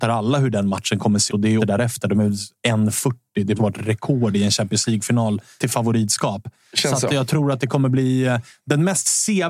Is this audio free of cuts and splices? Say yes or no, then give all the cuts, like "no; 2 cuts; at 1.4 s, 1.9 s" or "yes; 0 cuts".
no; 4 cuts; at 1.3 s, 1.6 s, 3.6 s, 5.6 s